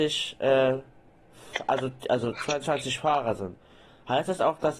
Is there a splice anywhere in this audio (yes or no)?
no